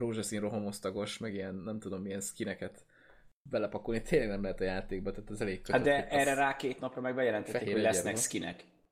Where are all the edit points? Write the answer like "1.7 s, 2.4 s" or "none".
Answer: none